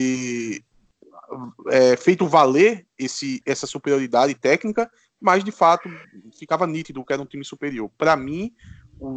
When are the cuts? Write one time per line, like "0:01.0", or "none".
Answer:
none

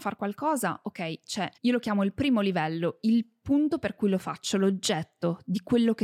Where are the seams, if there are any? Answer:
0:01.6

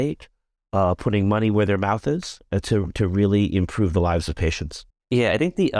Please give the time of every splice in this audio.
0:04.9

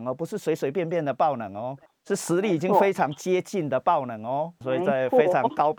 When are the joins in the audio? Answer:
0:01.8
0:04.6

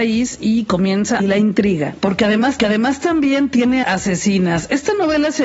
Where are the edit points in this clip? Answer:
0:01.2
0:02.6
0:03.8

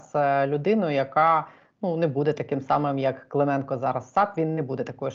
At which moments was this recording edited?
none

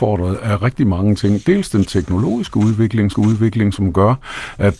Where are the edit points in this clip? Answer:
0:03.1

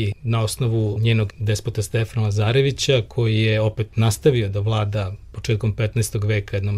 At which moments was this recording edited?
0:01.3

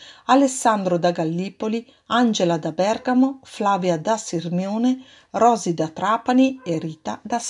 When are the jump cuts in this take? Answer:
none

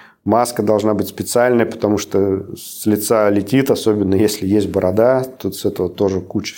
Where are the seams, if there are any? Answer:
none

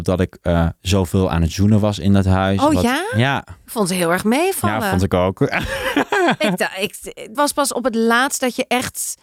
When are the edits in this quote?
0:07.3

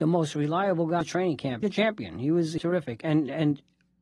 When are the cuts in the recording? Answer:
0:01.0
0:01.6
0:02.6

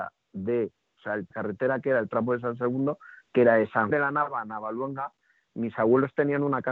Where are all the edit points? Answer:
0:01.3
0:03.9

